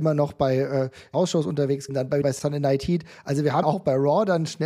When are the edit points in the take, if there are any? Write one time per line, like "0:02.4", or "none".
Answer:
0:01.1
0:01.9
0:02.2
0:03.6